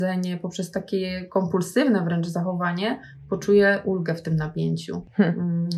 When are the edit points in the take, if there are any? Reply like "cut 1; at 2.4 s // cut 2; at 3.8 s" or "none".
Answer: none